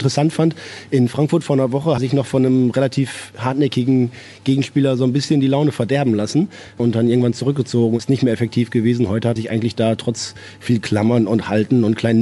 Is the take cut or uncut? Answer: cut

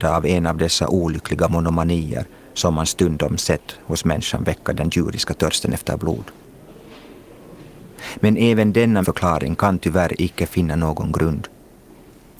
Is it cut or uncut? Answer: cut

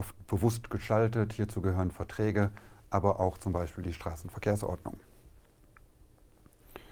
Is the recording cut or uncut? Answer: uncut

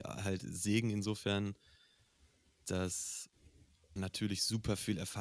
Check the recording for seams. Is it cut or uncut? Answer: cut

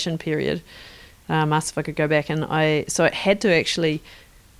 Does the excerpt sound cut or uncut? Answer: uncut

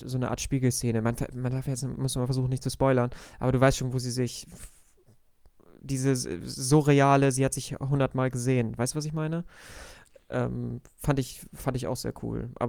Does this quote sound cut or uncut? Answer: uncut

